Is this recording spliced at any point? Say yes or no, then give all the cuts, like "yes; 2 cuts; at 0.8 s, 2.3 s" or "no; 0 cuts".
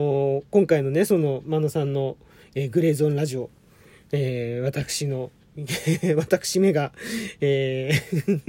no; 0 cuts